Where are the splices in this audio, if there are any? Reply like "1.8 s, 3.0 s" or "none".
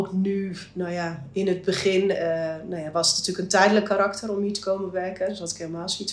none

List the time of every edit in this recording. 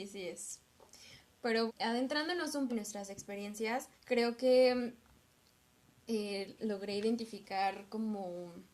1.7 s, 2.7 s, 4.0 s, 6.6 s

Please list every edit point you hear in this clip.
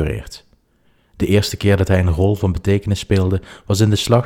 none

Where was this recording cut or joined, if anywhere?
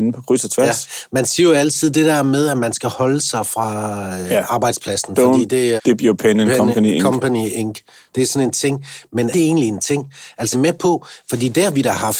5.8 s, 9.3 s, 10.5 s

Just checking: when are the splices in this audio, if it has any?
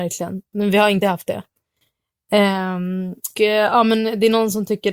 1.0 s, 3.3 s

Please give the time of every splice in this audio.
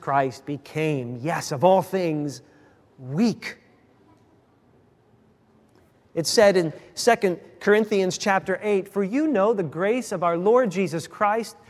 none

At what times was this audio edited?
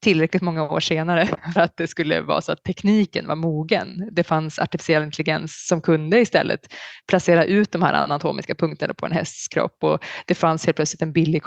1.6 s, 7.0 s

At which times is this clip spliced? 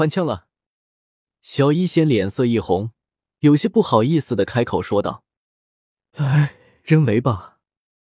none

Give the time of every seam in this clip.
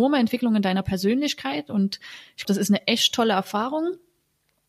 2.4 s

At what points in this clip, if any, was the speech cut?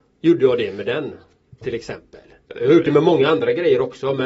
none

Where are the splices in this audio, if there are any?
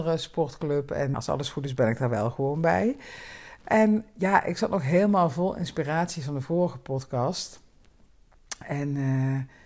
1.1 s

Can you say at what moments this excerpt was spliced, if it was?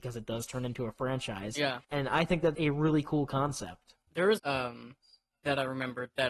1.8 s, 2.5 s, 4.0 s, 4.4 s

